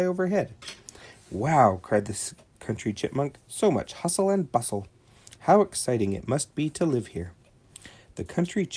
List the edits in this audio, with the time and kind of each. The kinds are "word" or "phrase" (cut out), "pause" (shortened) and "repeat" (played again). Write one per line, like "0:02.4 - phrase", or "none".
0:03.4 - pause